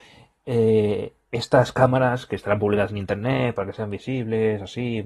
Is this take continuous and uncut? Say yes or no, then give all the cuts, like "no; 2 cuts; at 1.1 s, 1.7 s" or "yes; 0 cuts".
yes; 0 cuts